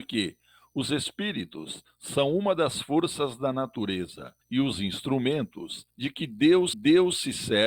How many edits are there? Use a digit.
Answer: 3